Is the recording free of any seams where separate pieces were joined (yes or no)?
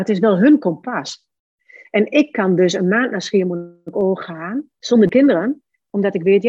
yes